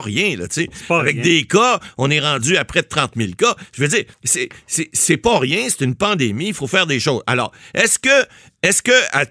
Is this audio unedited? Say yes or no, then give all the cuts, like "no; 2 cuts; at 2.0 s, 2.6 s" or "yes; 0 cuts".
no; 1 cut; at 4.1 s